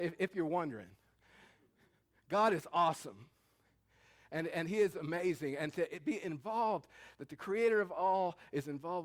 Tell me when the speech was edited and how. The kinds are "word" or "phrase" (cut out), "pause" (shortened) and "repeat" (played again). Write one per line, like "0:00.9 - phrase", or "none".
none